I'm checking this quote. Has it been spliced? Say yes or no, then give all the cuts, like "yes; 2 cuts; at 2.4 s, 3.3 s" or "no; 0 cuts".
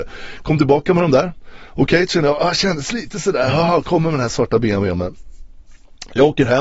no; 0 cuts